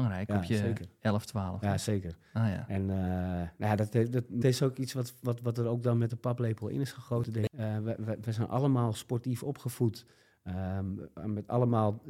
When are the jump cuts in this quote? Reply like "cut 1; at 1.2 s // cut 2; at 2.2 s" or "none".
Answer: cut 1; at 4.4 s

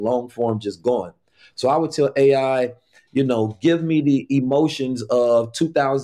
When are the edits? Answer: none

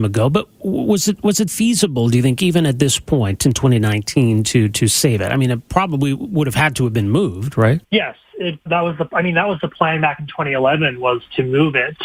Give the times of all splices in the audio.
cut 1; at 1.5 s // cut 2; at 7.8 s // cut 3; at 8.7 s

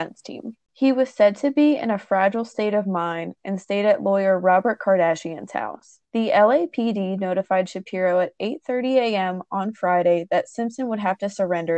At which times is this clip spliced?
cut 1; at 6.0 s

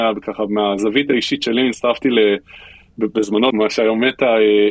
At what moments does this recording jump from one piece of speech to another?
cut 1; at 3.5 s

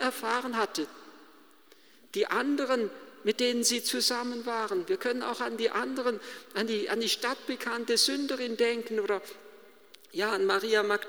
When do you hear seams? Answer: none

